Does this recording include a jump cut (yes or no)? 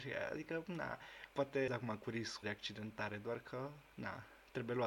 yes